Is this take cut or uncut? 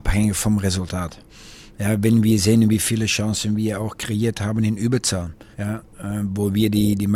cut